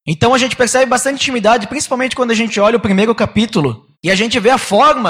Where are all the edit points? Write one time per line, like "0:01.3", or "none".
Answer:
0:03.9